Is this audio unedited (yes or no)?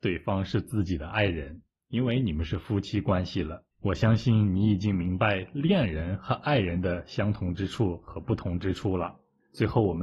no